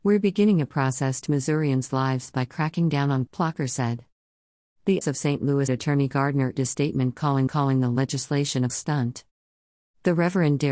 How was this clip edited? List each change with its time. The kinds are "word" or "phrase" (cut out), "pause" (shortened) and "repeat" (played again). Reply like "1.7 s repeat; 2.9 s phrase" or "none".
1.3 s word; 3.3 s word; 5.0 s word; 5.7 s word; 6.1 s word; 6.6 s word; 7.5 s repeat; 8.7 s word